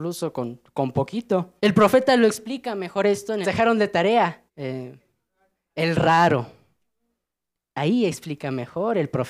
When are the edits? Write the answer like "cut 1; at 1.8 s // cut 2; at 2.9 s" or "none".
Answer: cut 1; at 1.6 s // cut 2; at 3.4 s // cut 3; at 4.5 s

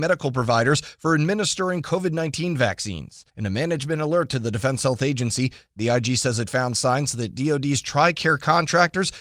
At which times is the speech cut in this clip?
cut 1; at 3.3 s

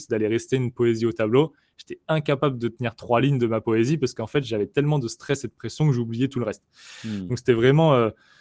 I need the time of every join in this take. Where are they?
none

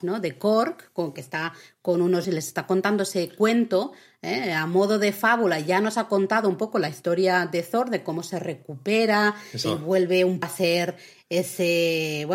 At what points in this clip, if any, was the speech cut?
cut 1; at 1.2 s // cut 2; at 2.2 s // cut 3; at 9.6 s // cut 4; at 10.4 s

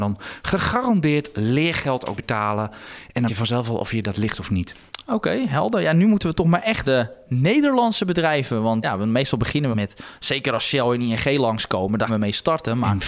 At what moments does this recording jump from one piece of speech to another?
cut 1; at 2.2 s // cut 2; at 3.3 s // cut 3; at 6.8 s // cut 4; at 8.8 s // cut 5; at 9.7 s // cut 6; at 12.1 s

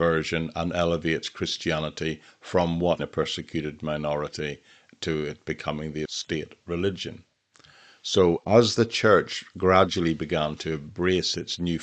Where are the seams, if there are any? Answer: cut 1; at 3.0 s // cut 2; at 6.1 s

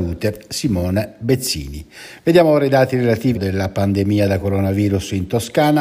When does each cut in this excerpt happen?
cut 1; at 3.3 s

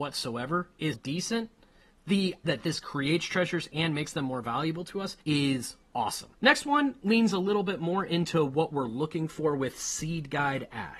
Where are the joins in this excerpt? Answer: cut 1; at 0.9 s // cut 2; at 2.5 s // cut 3; at 5.2 s // cut 4; at 6.4 s

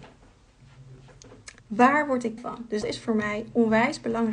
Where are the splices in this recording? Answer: cut 1; at 1.6 s // cut 2; at 2.4 s // cut 3; at 2.8 s

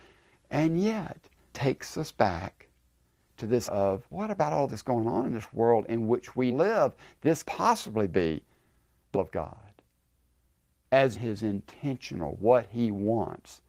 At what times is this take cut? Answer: cut 1; at 1.5 s // cut 2; at 3.7 s // cut 3; at 4.1 s // cut 4; at 4.7 s // cut 5; at 6.5 s // cut 6; at 7.4 s // cut 7; at 9.1 s // cut 8; at 11.1 s // cut 9; at 12.4 s

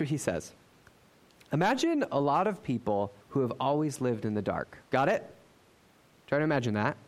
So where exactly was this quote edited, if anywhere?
cut 1; at 3.2 s // cut 2; at 4.9 s

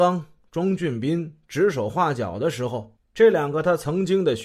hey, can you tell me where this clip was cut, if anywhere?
cut 1; at 3.0 s

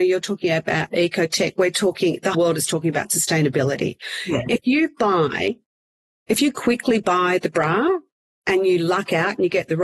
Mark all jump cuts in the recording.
cut 1; at 2.3 s

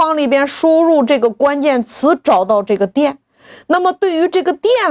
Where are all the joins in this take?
none

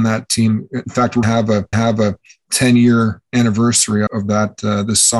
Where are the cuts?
cut 1; at 1.2 s // cut 2; at 1.7 s // cut 3; at 4.1 s

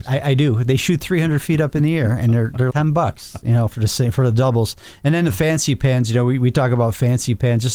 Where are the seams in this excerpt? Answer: cut 1; at 2.7 s

